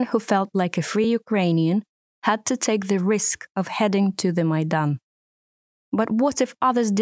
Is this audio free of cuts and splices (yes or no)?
yes